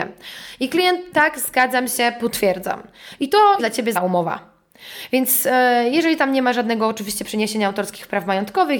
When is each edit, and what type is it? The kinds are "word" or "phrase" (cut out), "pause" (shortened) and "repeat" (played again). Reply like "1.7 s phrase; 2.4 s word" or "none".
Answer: 1.1 s word; 3.6 s word; 3.9 s word